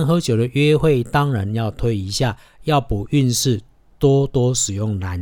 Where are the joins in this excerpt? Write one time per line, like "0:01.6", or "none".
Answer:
none